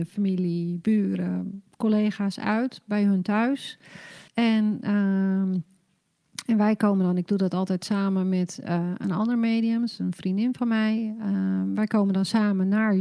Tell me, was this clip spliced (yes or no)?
yes